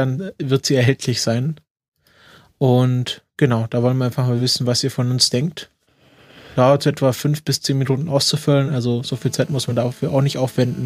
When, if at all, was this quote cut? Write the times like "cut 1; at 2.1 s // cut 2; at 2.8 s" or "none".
none